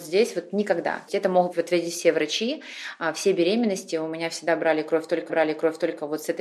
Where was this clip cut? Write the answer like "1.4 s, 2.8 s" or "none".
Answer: 1.1 s, 5.3 s